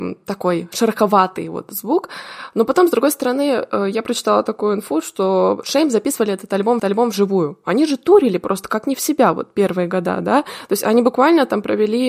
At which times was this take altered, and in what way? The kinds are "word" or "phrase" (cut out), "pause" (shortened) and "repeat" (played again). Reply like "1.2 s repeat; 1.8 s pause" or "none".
6.8 s repeat